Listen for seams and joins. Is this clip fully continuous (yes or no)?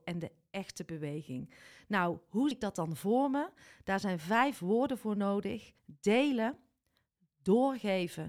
no